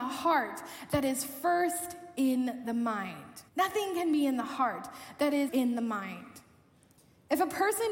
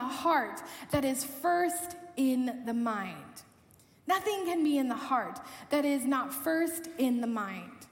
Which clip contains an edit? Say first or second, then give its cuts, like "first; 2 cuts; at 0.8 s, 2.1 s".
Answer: first; 2 cuts; at 3.5 s, 5.5 s